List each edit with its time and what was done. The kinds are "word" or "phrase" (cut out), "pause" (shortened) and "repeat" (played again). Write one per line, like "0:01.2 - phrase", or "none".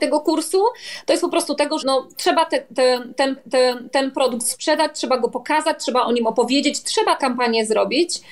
0:01.8 - word
0:03.4 - repeat
0:07.2 - word